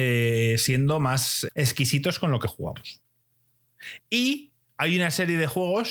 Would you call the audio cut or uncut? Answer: cut